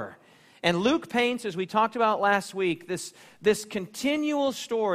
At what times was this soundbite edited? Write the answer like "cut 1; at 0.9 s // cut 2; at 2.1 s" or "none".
none